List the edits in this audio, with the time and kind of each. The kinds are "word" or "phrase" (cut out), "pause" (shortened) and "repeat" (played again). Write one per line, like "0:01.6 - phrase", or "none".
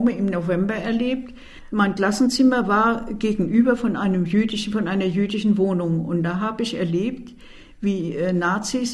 none